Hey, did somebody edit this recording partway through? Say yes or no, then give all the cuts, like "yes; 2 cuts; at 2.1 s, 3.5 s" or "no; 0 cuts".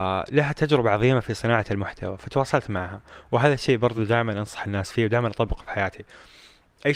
no; 0 cuts